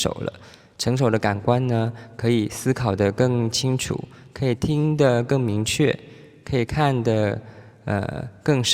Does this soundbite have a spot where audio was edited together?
no; 0 cuts

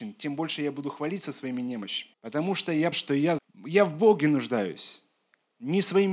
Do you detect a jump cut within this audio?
yes; 3 cuts; at 2.1 s, 2.9 s, 3.4 s

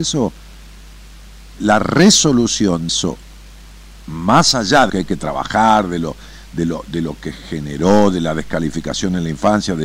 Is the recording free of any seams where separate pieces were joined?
no; 3 cuts; at 1.5 s, 2.9 s, 4.9 s

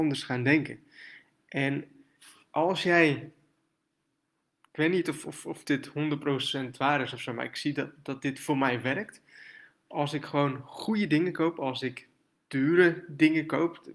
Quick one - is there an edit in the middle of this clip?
no; 0 cuts

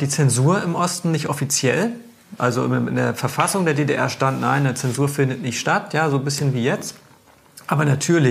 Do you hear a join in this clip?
no; 0 cuts

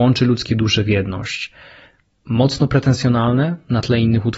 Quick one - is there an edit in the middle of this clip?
no; 0 cuts

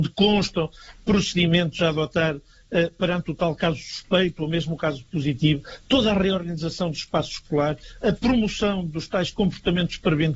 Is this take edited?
no; 0 cuts

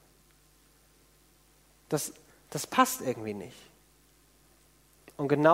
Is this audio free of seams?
yes; 0 cuts

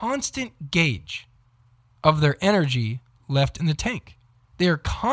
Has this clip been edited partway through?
no; 0 cuts

